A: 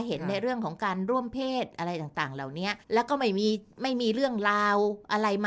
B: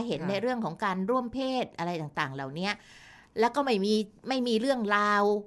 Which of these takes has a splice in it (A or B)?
A